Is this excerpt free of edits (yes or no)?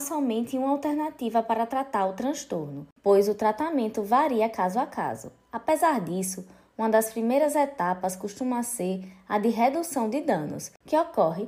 yes